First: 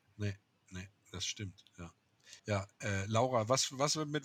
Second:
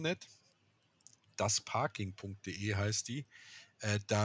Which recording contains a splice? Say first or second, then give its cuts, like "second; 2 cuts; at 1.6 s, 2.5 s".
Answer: first; 1 cut; at 2.4 s